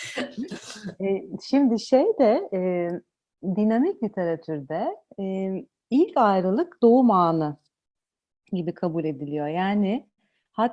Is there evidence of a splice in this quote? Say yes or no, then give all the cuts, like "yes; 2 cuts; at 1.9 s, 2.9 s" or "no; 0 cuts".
no; 0 cuts